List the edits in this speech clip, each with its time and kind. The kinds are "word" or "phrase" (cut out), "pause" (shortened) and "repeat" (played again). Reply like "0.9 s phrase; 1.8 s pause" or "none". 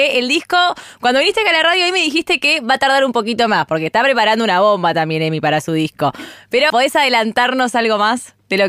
6.7 s word